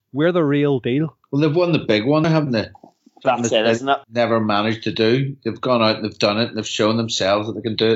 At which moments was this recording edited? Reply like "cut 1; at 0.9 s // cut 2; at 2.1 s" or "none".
cut 1; at 1.2 s // cut 2; at 2.2 s // cut 3; at 4.0 s